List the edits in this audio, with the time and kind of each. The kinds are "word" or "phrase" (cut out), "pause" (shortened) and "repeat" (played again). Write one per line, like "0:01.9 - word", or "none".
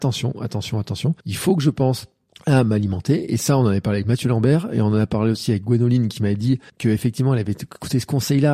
0:01.2 - pause
0:02.3 - pause
0:06.7 - pause